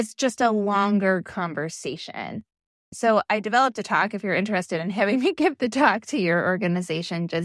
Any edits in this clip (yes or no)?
no